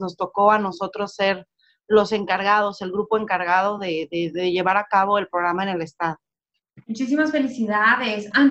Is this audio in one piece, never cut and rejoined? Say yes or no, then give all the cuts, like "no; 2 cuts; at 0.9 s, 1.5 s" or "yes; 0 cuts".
yes; 0 cuts